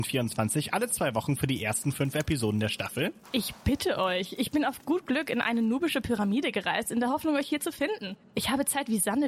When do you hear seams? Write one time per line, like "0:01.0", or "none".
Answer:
0:03.2